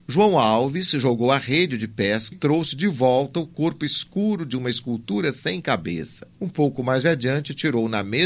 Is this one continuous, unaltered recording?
no; 2 cuts; at 2.3 s, 6.3 s

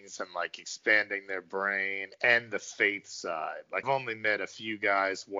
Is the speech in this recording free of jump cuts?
no; 1 cut; at 3.8 s

